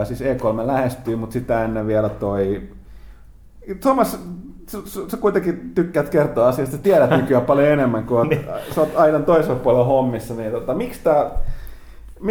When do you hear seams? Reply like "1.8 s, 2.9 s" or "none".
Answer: none